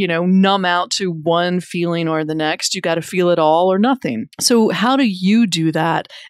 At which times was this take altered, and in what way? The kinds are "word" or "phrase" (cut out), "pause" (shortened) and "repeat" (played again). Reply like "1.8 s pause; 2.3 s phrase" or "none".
4.3 s pause